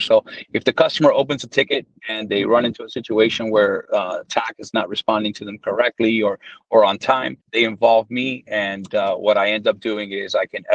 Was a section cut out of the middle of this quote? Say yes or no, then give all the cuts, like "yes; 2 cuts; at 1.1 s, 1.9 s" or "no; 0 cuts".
yes; 1 cut; at 7.4 s